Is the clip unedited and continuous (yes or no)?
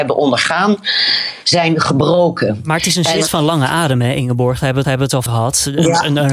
no